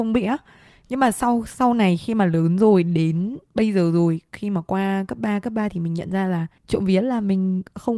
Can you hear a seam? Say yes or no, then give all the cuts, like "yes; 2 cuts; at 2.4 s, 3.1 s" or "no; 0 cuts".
yes; 1 cut; at 6.6 s